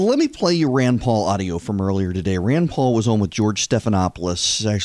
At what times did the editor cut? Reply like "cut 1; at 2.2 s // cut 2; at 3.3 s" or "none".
none